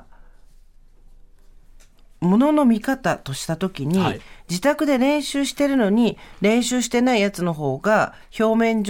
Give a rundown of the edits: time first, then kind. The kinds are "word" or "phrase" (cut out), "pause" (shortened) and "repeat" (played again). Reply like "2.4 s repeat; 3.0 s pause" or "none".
none